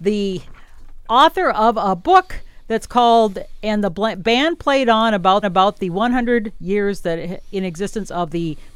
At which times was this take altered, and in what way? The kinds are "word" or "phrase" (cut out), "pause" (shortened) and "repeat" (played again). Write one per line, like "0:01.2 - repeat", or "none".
0:01.1 - word
0:05.4 - repeat